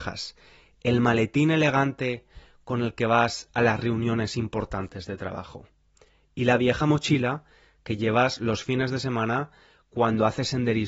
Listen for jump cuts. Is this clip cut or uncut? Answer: uncut